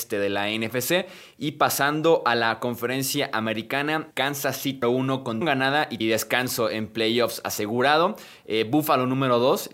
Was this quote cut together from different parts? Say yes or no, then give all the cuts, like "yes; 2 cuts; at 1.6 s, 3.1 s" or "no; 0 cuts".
yes; 4 cuts; at 4.1 s, 4.8 s, 5.4 s, 6.0 s